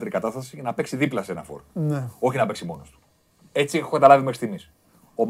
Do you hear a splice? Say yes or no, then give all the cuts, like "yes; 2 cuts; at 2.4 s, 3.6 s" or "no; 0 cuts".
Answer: no; 0 cuts